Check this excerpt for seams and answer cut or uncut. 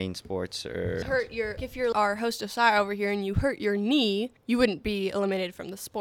cut